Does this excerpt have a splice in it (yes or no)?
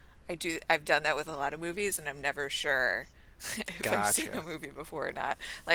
yes